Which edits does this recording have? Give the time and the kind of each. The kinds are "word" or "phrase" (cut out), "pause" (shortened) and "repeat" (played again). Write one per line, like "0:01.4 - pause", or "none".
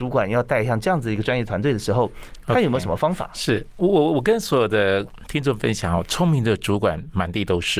none